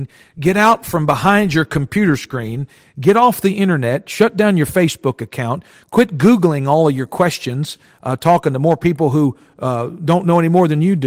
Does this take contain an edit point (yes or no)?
no